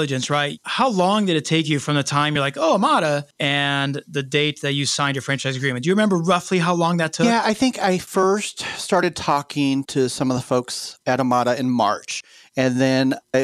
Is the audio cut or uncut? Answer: uncut